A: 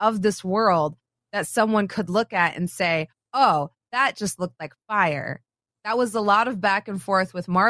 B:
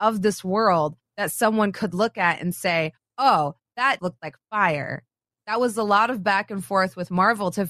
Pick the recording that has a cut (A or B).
B